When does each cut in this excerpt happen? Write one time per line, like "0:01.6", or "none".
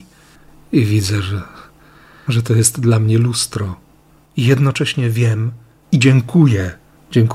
none